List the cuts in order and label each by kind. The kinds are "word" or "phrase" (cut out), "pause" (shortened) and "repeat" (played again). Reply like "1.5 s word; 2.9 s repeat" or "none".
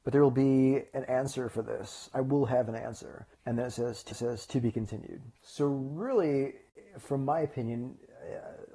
3.3 s pause; 4.1 s repeat; 5.4 s pause